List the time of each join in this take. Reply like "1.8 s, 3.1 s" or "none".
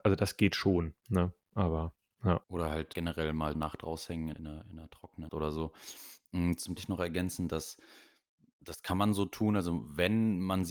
2.4 s, 2.9 s, 3.5 s, 4.3 s, 5.3 s, 6.8 s